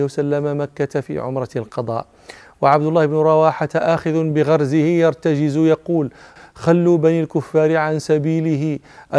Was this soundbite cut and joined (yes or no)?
no